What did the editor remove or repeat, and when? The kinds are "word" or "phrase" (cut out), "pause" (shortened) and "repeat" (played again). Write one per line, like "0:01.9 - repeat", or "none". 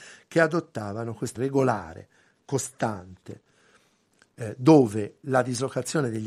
0:01.4 - word

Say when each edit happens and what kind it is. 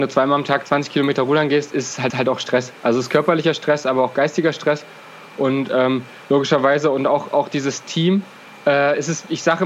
0:02.1 - repeat

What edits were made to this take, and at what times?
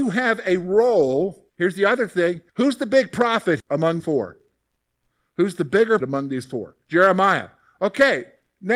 0:01.5 - pause
0:02.5 - pause
0:03.6 - word
0:04.0 - word
0:06.0 - word
0:06.8 - pause

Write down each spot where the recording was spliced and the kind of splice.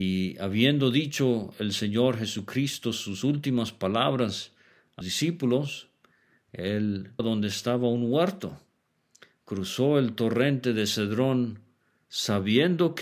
0:05.0 - word
0:07.2 - word

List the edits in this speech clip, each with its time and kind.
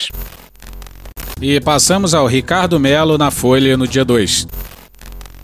none

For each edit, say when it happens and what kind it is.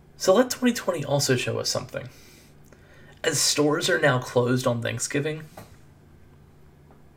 none

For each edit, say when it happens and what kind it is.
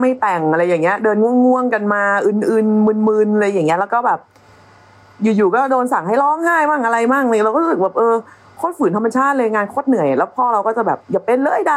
none

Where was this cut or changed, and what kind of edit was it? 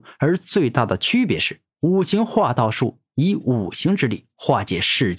0:01.7 - pause

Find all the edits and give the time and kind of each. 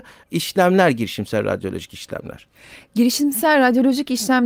none

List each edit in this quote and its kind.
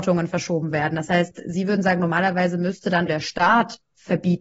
0:03.1 - word

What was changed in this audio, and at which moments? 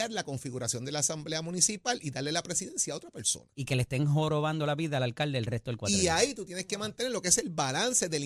none

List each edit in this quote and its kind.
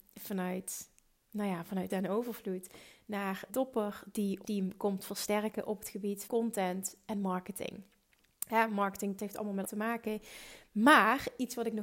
0:01.9 - word
0:03.5 - word
0:04.4 - word
0:06.3 - word
0:09.2 - word
0:09.6 - word

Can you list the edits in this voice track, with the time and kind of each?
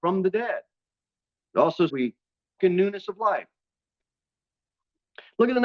0:01.9 - word
0:02.6 - word

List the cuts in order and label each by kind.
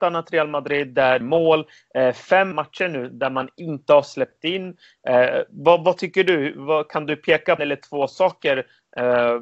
0:01.2 - phrase
0:02.5 - word
0:07.6 - phrase

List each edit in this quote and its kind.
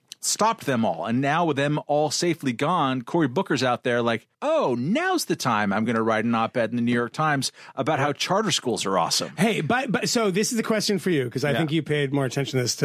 0:04.3 - pause

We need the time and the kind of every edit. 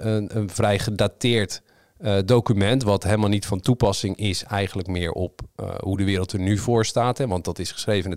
none

